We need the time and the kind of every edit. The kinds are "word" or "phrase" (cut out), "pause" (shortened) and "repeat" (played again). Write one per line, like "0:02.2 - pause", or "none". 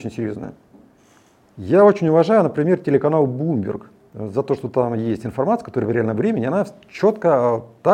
none